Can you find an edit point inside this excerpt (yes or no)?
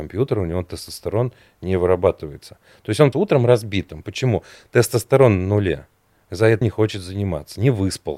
yes